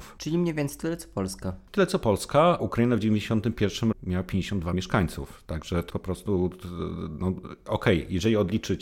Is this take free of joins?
no; 4 cuts; at 2.6 s, 3.9 s, 4.7 s, 5.9 s

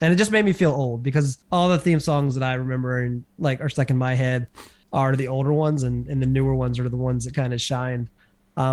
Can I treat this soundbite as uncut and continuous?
no; 2 cuts; at 1.4 s, 4.8 s

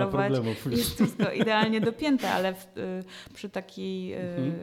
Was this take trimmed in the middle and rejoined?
no; 0 cuts

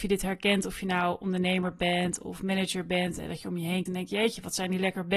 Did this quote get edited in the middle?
yes; 1 cut; at 3.9 s

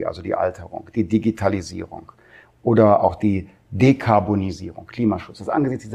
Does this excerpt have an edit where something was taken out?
no; 0 cuts

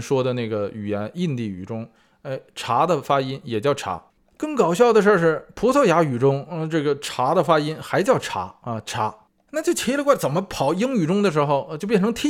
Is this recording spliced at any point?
no; 0 cuts

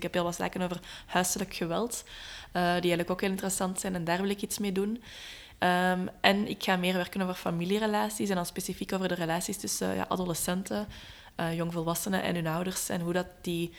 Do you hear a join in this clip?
no; 0 cuts

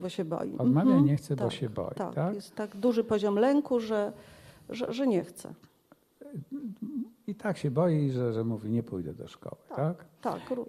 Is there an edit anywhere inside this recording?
no; 0 cuts

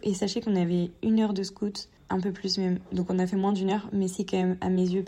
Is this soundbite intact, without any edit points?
no; 1 cut; at 2.0 s

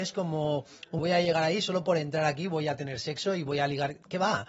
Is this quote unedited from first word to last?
no; 1 cut; at 1.0 s

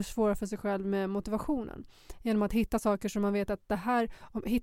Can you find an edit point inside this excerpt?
no; 0 cuts

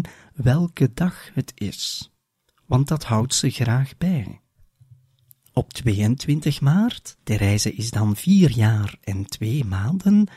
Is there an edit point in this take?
no; 0 cuts

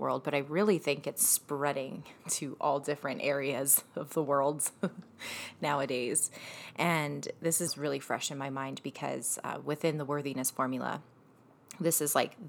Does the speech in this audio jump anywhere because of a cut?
yes; 2 cuts; at 2.2 s, 7.7 s

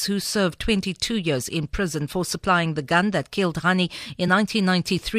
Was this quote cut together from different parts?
no; 0 cuts

